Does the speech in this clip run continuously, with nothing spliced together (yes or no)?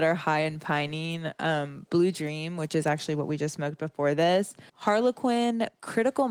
no